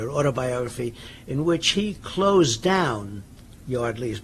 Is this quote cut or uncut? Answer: uncut